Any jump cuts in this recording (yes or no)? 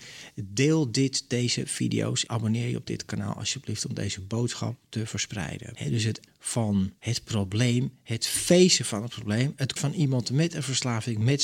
yes